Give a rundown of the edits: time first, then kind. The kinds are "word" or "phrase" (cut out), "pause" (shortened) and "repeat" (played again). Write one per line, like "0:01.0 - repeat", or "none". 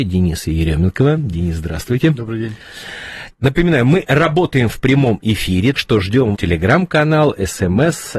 0:03.3 - pause
0:05.8 - word
0:06.4 - phrase